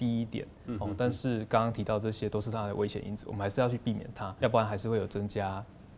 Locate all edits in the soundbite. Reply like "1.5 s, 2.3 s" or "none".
4.4 s